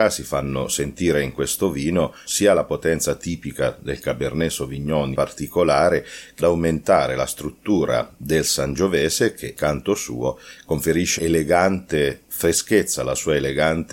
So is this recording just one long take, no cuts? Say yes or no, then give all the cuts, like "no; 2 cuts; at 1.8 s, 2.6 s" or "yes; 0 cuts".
no; 5 cuts; at 2.2 s, 5.1 s, 6.4 s, 9.6 s, 11.2 s